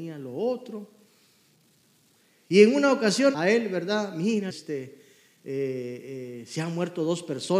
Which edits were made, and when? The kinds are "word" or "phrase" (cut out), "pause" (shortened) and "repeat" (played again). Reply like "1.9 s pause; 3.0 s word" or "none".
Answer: 3.3 s phrase; 4.5 s phrase